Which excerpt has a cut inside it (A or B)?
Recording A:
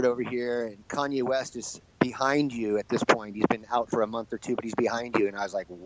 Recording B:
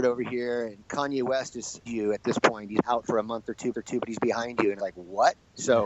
B